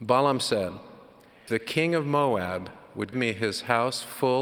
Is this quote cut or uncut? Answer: cut